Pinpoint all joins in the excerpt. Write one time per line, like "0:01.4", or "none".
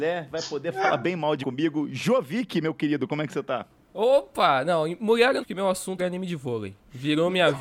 0:01.4
0:05.4
0:06.0